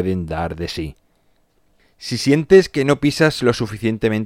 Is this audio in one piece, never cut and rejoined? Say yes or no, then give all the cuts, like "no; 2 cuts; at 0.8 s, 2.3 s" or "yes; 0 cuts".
yes; 0 cuts